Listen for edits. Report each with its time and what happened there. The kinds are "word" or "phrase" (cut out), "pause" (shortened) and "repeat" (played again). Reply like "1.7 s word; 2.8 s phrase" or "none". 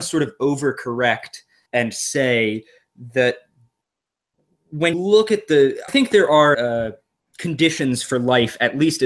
1.7 s word; 4.9 s word; 5.9 s word; 6.5 s word